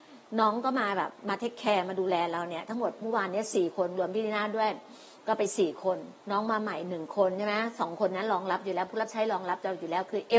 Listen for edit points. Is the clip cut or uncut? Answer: cut